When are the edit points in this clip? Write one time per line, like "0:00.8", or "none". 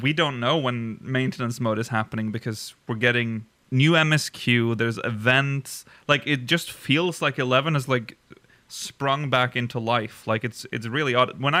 none